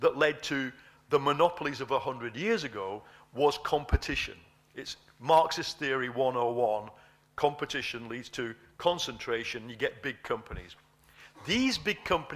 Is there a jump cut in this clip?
no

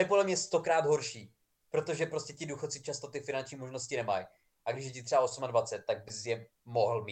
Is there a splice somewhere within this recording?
no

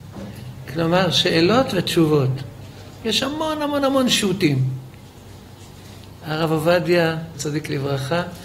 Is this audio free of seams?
no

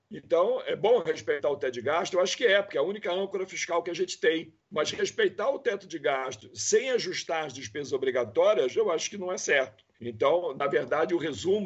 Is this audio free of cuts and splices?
no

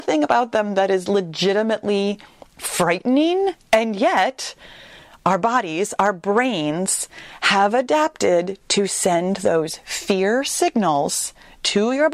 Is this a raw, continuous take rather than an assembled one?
yes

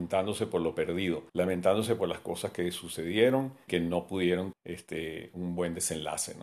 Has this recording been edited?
yes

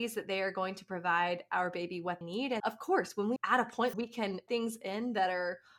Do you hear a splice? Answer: yes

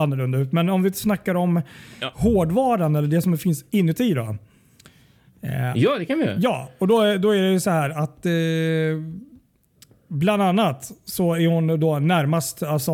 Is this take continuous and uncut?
yes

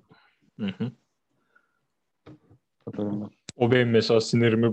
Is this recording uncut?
yes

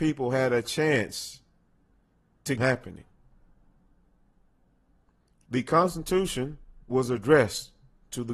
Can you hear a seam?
yes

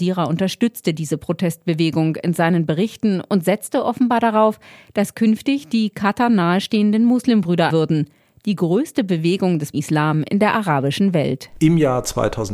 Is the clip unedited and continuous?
no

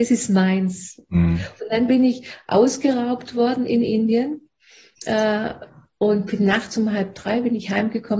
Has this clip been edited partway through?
no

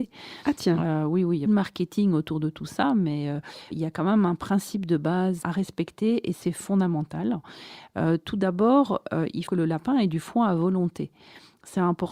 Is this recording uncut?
no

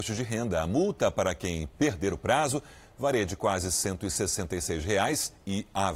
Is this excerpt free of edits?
yes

